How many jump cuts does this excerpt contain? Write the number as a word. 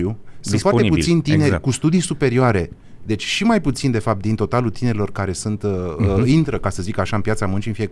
zero